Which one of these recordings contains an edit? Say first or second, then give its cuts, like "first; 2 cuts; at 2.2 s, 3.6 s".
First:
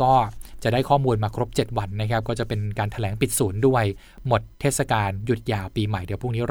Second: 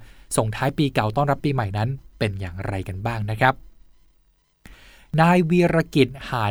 first; 1 cut; at 4.5 s